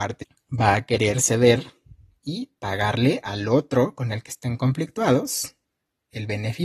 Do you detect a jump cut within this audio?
no; 0 cuts

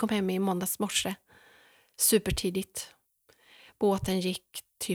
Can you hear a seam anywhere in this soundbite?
no; 0 cuts

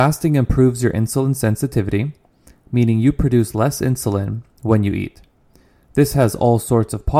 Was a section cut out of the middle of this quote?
no; 0 cuts

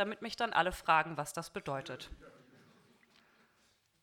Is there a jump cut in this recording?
no; 0 cuts

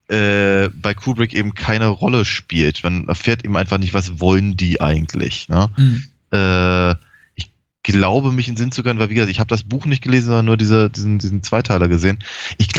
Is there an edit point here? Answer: no; 0 cuts

